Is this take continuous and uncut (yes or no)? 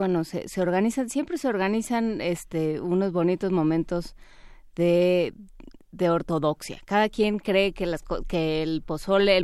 yes